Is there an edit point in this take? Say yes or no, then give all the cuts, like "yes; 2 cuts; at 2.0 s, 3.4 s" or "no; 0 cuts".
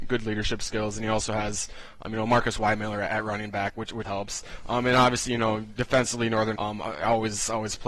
yes; 2 cuts; at 4.0 s, 6.6 s